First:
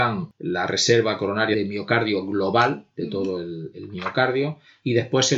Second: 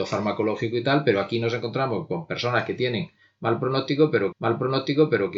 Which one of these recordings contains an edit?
second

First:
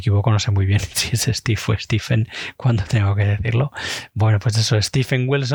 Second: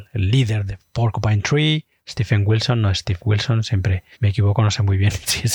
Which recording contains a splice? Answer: second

